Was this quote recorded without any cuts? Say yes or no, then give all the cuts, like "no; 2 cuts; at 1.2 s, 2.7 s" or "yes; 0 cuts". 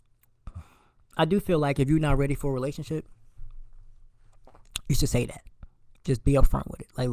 yes; 0 cuts